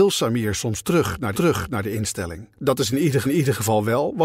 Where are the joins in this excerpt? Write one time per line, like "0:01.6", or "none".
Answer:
0:01.3
0:02.5
0:03.2